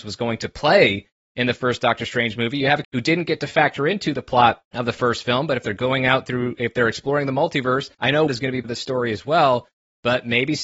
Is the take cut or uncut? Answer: cut